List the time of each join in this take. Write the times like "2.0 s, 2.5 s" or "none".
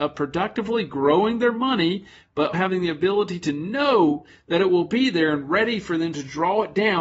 2.5 s